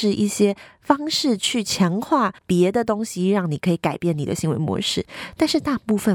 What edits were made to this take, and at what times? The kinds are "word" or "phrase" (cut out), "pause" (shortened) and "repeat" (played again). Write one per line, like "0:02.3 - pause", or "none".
0:02.4 - pause